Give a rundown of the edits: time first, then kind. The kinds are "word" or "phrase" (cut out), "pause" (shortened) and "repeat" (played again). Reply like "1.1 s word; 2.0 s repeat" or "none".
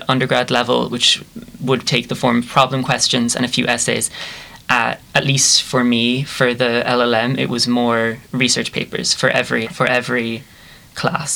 1.8 s word; 5.0 s word; 9.6 s word